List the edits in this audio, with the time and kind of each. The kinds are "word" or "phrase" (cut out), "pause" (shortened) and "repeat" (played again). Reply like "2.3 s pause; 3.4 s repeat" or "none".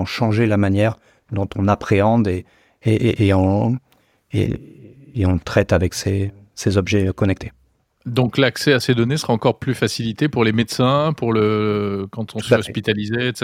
none